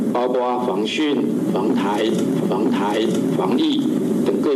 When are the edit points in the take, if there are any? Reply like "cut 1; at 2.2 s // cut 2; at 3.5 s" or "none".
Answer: cut 1; at 2.4 s